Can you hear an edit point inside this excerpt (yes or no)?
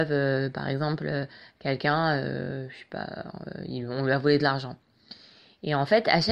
no